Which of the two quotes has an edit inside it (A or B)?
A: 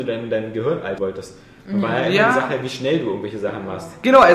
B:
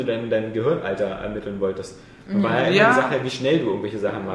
A